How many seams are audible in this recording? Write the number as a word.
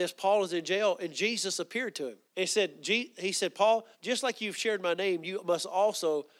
two